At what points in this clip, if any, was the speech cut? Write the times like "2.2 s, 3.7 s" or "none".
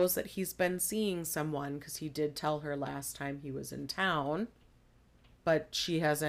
none

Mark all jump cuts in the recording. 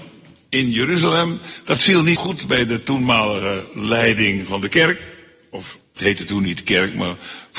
2.2 s, 6.0 s

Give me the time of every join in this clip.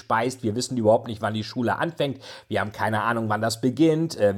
none

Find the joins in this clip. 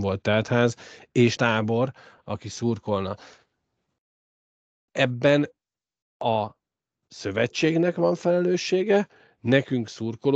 1.4 s

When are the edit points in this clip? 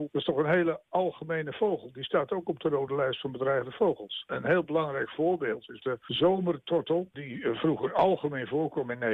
none

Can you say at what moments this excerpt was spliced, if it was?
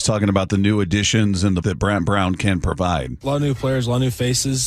1.6 s

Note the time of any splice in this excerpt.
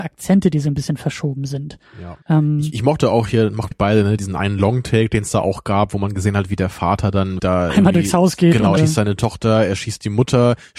2.2 s, 3.7 s, 4.2 s, 7.4 s, 8.8 s

